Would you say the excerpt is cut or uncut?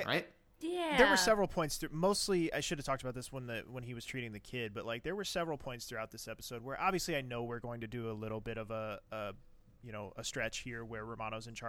uncut